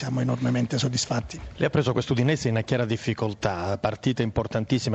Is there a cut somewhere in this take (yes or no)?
no